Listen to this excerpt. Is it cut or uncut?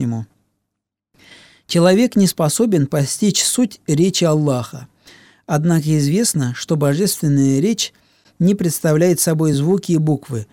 uncut